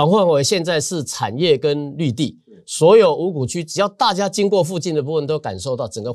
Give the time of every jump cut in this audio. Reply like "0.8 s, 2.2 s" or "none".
none